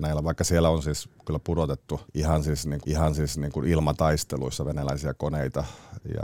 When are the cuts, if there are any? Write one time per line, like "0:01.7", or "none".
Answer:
0:02.8